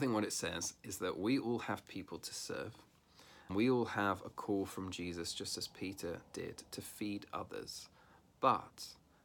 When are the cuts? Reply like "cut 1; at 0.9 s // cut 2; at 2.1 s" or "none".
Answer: cut 1; at 3.5 s